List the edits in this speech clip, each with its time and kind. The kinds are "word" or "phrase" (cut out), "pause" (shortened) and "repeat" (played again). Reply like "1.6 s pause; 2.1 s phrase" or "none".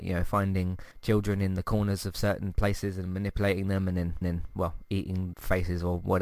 0.9 s pause; 4.2 s repeat; 5.3 s word